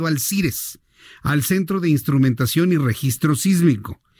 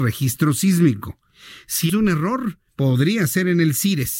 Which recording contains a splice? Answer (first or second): second